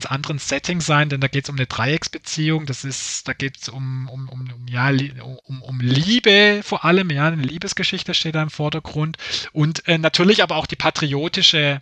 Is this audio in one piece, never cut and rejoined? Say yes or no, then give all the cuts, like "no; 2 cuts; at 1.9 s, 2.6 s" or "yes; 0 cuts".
no; 1 cut; at 5.4 s